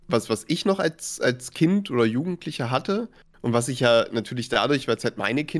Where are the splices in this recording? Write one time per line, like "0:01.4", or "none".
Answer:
none